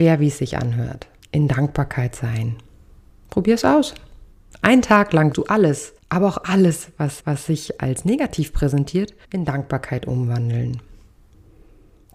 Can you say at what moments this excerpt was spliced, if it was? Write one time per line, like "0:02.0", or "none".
0:01.2
0:03.1
0:04.3
0:05.3
0:06.0
0:07.2
0:09.2